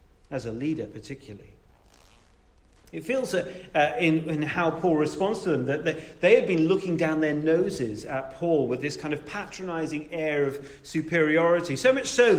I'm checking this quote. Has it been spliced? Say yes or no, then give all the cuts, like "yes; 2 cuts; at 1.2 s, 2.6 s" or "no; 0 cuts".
no; 0 cuts